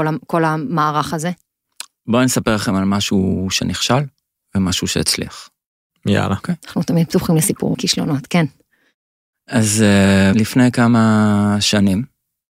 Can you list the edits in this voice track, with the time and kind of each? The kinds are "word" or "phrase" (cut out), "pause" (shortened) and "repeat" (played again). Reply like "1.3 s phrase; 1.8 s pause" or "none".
7.7 s word; 10.3 s word